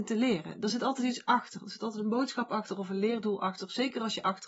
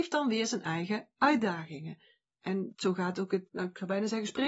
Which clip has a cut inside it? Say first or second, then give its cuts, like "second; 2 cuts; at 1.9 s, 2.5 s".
second; 2 cuts; at 2.7 s, 3.5 s